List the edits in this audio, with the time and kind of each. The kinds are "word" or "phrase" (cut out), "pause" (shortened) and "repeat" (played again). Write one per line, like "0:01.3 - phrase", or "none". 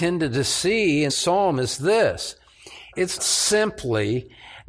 0:01.1 - word
0:03.2 - word